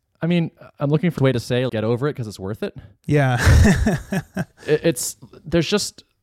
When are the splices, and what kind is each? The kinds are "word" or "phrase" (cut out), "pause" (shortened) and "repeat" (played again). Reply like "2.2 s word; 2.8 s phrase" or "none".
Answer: 1.2 s phrase; 1.7 s word